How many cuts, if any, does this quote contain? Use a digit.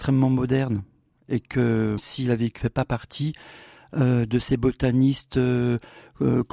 2